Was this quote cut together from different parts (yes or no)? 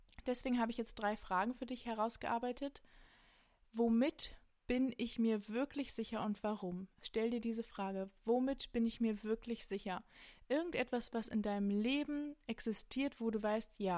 no